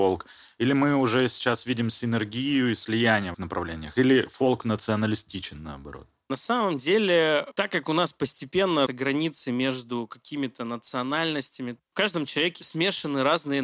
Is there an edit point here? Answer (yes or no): yes